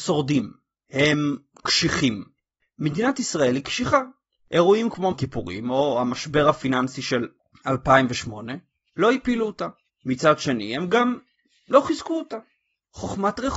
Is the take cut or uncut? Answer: cut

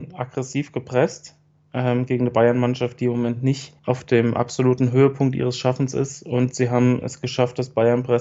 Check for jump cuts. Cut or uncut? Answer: cut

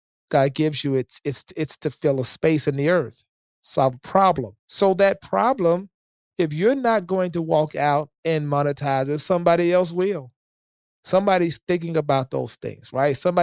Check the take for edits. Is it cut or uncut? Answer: cut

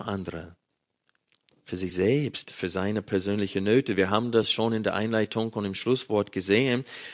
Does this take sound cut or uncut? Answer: uncut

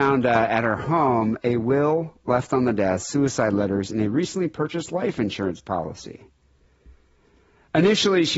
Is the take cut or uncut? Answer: uncut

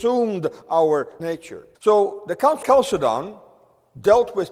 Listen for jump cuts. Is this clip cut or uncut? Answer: cut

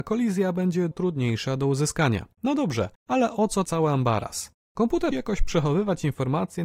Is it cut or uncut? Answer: cut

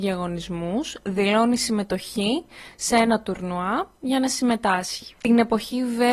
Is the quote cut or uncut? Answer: uncut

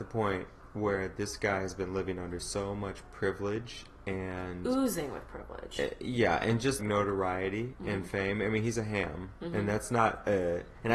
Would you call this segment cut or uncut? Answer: cut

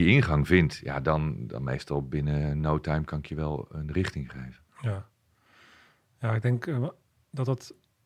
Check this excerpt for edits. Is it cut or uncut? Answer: uncut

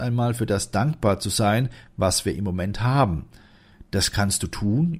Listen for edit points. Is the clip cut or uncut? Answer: uncut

